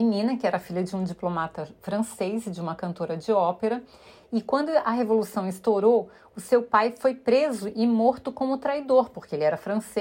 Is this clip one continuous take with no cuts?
yes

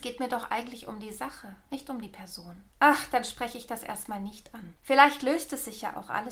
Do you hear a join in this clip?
yes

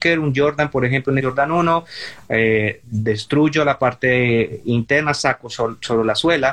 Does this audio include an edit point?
yes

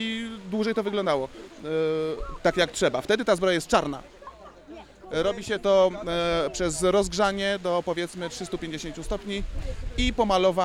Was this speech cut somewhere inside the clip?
no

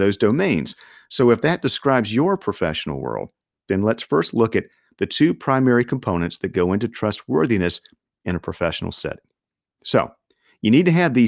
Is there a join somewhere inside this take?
no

